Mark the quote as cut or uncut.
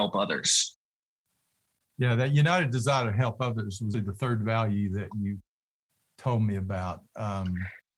cut